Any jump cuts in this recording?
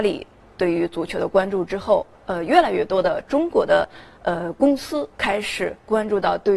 yes; 1 cut; at 5.1 s

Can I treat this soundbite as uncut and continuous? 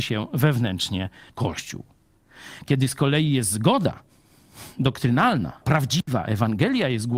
no; 2 cuts; at 1.3 s, 5.6 s

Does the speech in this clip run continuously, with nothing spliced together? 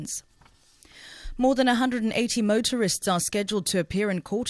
yes; 0 cuts

